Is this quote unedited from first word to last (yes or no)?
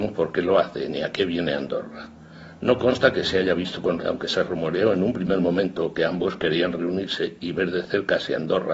no